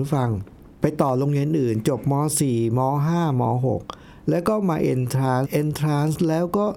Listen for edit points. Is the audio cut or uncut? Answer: cut